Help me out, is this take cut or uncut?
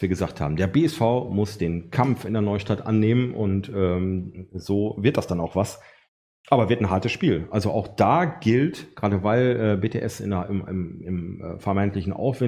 uncut